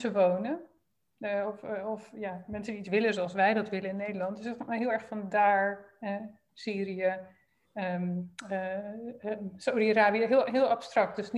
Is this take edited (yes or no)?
no